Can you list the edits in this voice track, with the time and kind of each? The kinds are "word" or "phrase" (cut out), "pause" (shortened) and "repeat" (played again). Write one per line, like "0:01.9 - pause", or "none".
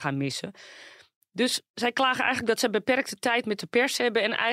none